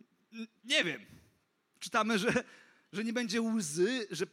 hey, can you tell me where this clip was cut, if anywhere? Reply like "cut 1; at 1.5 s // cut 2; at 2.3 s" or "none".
none